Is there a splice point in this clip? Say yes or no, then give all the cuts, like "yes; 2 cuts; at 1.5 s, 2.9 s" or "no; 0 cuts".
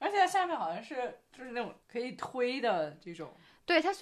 yes; 1 cut; at 1.8 s